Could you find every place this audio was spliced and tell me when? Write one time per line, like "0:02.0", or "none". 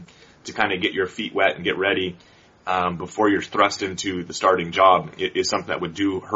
none